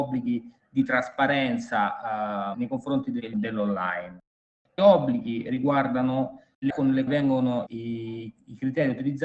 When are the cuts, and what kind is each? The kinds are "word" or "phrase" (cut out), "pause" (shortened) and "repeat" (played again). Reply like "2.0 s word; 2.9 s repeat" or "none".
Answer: 2.5 s word; 3.3 s word; 4.8 s word; 6.7 s word; 7.1 s word; 7.7 s word